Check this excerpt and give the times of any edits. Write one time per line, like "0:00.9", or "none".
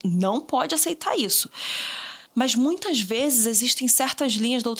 0:02.3